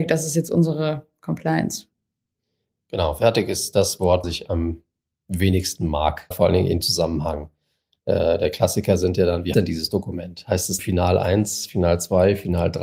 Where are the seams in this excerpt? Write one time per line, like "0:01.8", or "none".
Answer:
0:04.2
0:06.3
0:06.8
0:09.5
0:10.8